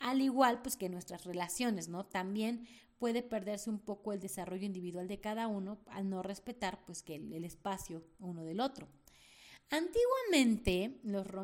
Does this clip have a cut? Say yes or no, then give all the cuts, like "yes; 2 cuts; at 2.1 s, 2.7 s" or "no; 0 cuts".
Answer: no; 0 cuts